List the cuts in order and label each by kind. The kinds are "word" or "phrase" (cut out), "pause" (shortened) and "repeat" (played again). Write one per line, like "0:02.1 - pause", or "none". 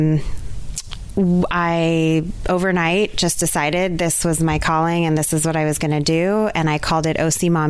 none